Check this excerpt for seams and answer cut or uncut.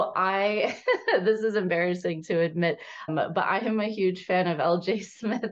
cut